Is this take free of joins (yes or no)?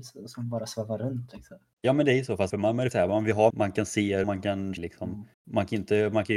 no